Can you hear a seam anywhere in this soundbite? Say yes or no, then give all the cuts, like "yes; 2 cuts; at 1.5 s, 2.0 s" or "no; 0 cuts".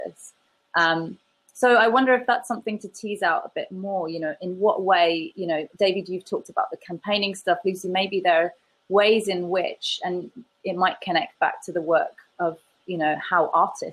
no; 0 cuts